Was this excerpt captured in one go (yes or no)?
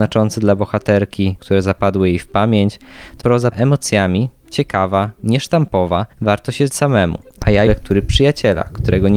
no